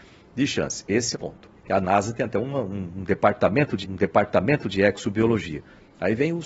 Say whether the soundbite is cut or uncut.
cut